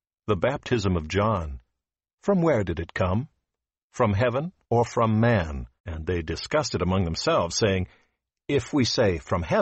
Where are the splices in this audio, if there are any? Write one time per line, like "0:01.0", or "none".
0:04.6
0:05.8